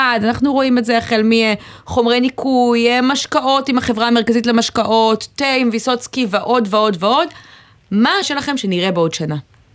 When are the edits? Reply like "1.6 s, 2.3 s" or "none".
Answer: 8.2 s